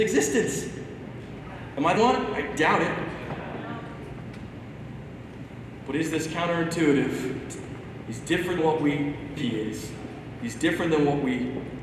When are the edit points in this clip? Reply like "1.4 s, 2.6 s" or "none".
2.0 s, 8.6 s, 9.4 s